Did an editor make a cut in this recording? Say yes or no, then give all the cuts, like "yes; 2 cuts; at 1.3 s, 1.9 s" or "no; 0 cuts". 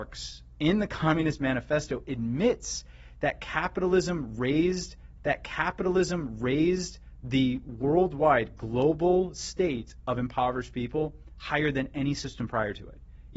yes; 1 cut; at 5.2 s